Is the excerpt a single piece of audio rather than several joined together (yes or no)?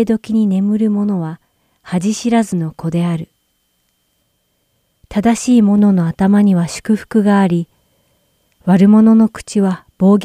yes